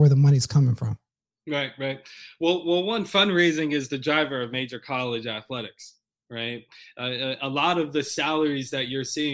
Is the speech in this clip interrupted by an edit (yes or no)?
no